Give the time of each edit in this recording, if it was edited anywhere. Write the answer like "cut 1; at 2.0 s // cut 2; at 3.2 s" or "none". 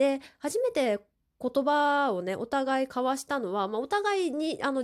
none